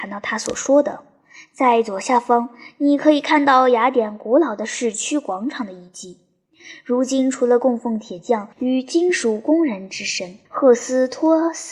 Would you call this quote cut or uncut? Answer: cut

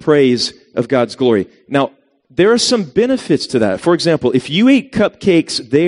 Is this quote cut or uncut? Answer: uncut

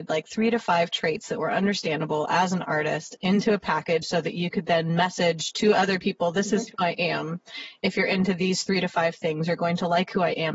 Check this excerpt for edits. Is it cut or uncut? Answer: uncut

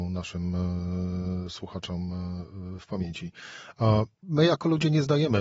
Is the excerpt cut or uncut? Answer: cut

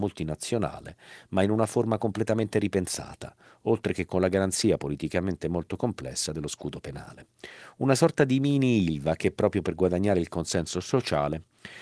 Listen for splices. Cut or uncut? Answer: uncut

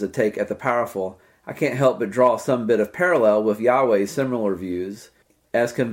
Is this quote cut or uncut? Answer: uncut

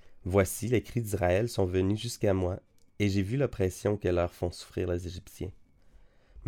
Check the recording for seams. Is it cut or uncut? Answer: uncut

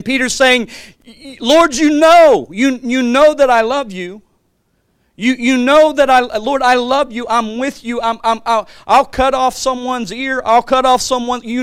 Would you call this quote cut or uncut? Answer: uncut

